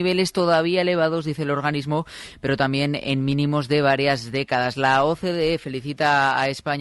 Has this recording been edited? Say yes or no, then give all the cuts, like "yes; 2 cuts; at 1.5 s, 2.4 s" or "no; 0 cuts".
no; 0 cuts